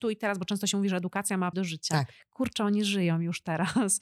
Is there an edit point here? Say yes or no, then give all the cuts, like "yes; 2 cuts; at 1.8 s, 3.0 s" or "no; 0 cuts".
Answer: yes; 1 cut; at 1.5 s